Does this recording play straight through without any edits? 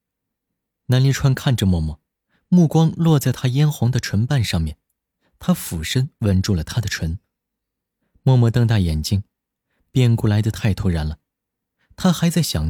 yes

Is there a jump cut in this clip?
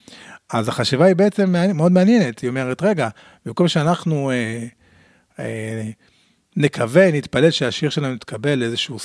no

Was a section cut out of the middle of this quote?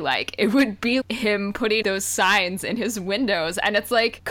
yes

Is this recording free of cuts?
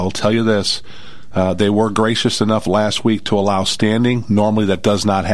yes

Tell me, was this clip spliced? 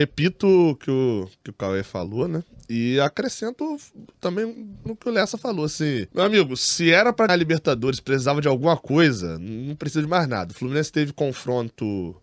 yes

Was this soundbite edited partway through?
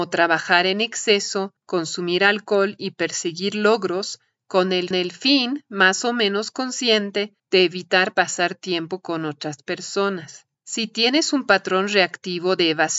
yes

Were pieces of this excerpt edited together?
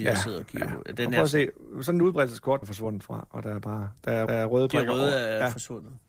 yes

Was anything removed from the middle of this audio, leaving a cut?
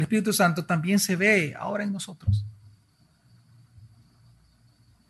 no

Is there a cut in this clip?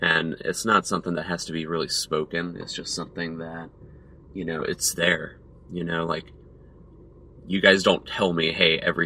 no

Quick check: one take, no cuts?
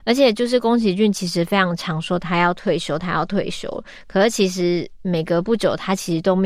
yes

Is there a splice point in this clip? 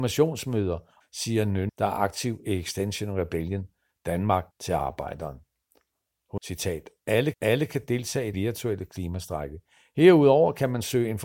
yes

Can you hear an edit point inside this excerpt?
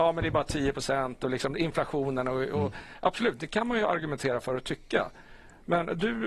no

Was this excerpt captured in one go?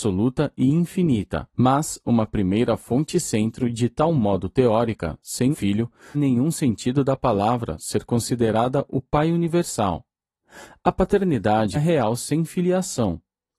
no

